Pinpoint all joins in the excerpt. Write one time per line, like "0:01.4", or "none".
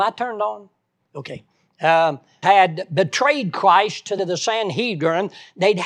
0:02.4
0:04.2